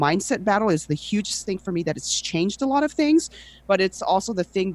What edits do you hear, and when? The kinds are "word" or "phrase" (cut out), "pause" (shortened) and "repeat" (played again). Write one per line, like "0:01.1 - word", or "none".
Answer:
none